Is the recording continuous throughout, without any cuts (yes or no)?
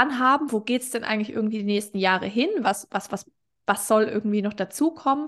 yes